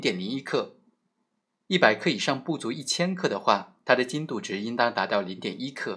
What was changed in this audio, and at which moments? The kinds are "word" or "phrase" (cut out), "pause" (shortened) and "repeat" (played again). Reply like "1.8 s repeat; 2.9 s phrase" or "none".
none